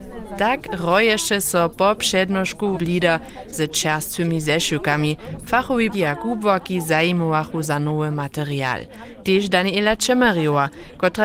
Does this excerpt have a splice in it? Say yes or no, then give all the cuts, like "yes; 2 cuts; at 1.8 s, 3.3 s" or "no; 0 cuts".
yes; 3 cuts; at 2.7 s, 5.9 s, 7.6 s